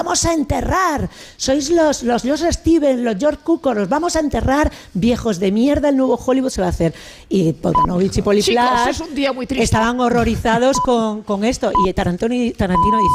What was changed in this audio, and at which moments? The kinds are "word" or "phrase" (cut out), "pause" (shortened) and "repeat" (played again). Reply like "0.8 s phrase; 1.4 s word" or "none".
none